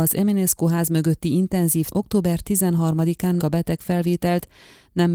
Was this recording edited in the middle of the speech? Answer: yes; 2 cuts; at 1.9 s, 3.4 s

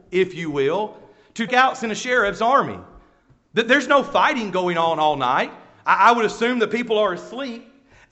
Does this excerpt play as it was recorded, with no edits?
no; 1 cut; at 1.5 s

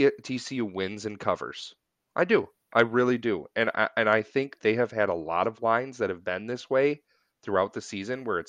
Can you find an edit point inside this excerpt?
yes; 2 cuts; at 2.0 s, 4.6 s

